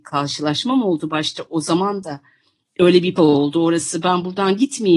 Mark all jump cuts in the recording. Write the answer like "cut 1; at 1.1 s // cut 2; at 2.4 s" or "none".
cut 1; at 3.2 s